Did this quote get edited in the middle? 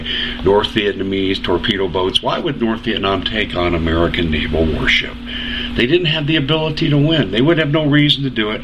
no; 0 cuts

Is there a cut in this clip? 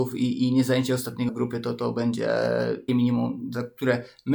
yes; 2 cuts; at 1.3 s, 2.9 s

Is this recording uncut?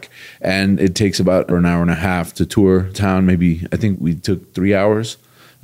no; 3 cuts; at 1.5 s, 2.9 s, 3.9 s

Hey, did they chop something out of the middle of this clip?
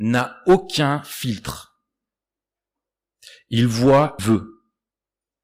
yes; 1 cut; at 4.2 s

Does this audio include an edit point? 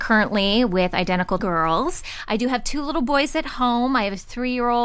yes; 1 cut; at 1.4 s

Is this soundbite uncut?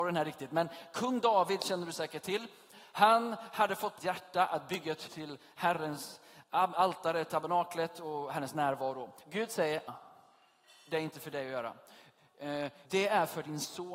no; 5 cuts; at 4.0 s, 5.1 s, 6.4 s, 9.9 s, 12.8 s

